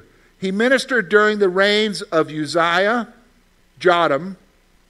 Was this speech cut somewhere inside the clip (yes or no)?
no